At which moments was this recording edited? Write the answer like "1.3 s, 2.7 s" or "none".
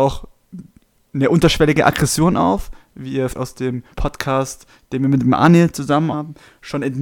3.3 s, 3.9 s, 6.1 s